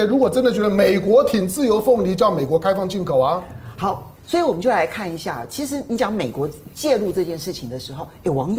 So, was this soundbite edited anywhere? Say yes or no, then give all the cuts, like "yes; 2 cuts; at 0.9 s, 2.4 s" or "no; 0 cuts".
yes; 1 cut; at 4.2 s